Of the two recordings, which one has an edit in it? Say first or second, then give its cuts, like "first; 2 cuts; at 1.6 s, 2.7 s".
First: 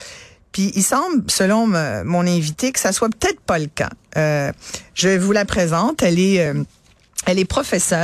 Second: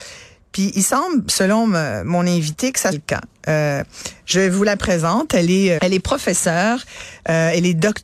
second; 2 cuts; at 2.9 s, 5.8 s